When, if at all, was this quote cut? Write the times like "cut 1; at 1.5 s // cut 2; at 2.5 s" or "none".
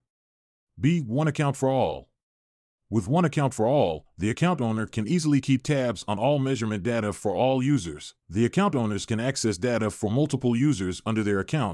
cut 1; at 8.2 s